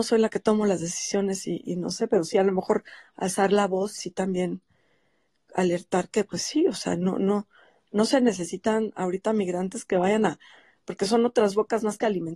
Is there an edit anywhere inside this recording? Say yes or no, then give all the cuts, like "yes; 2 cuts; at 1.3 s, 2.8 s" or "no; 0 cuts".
yes; 1 cut; at 4.0 s